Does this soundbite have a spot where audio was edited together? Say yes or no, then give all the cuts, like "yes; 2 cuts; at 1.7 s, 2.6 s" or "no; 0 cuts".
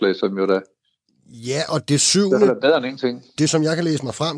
yes; 1 cut; at 3.5 s